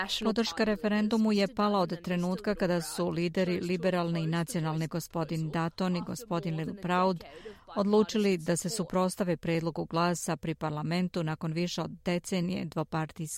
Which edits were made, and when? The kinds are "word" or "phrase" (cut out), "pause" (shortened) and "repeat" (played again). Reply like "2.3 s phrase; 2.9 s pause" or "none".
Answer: 4.9 s word

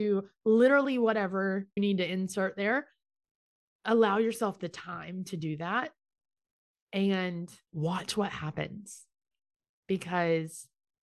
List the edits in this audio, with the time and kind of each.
1.8 s phrase

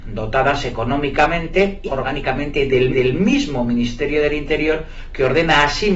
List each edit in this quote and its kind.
1.9 s word; 2.9 s repeat

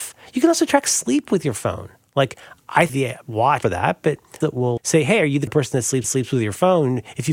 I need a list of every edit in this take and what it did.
2.9 s word; 3.6 s phrase; 4.4 s phrase; 4.8 s word; 5.5 s word; 6.0 s repeat

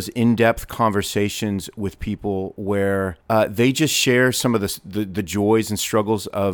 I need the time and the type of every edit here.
3.2 s pause

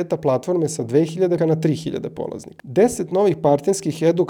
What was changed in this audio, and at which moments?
1.4 s word

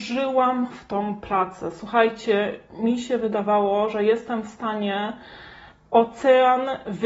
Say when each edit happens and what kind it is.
none

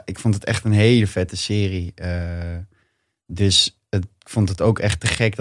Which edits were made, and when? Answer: none

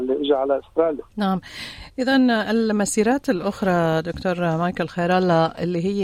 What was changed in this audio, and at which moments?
1.1 s pause

